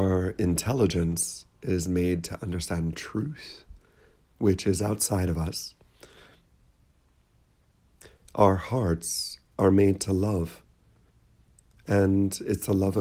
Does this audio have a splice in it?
no; 0 cuts

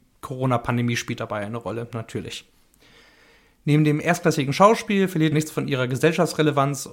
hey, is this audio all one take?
no; 1 cut; at 5.3 s

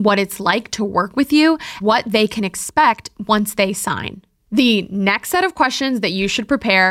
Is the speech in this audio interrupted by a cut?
yes; 1 cut; at 1.8 s

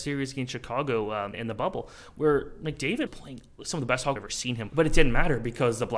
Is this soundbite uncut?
no; 4 cuts; at 1.3 s, 3.1 s, 4.2 s, 4.7 s

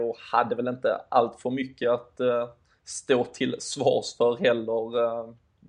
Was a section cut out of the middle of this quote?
no; 0 cuts

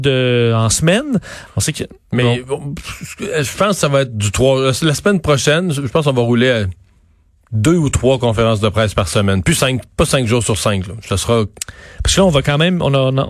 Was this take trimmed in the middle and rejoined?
no; 0 cuts

